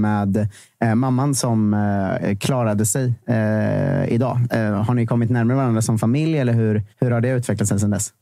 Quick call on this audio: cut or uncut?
cut